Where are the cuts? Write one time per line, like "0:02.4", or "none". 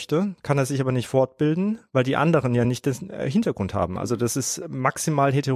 none